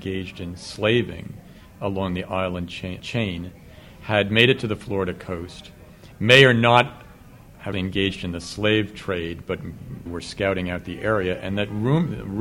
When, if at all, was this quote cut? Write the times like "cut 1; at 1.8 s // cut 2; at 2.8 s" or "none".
cut 1; at 3.0 s // cut 2; at 7.7 s // cut 3; at 10.1 s